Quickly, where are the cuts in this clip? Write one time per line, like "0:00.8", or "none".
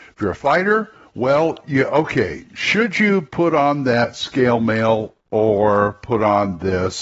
none